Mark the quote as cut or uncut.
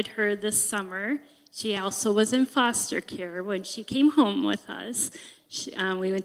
uncut